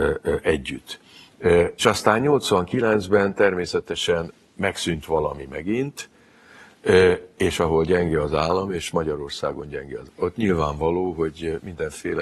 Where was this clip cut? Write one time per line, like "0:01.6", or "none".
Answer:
0:01.8
0:10.1